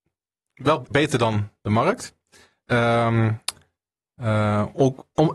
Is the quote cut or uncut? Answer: cut